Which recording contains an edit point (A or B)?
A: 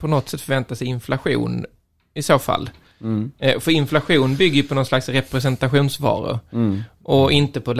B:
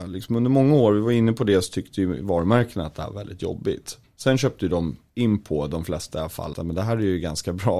B